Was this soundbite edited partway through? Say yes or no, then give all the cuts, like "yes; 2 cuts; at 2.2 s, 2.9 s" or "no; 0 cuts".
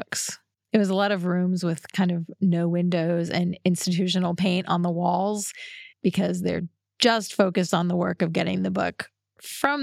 yes; 1 cut; at 5.9 s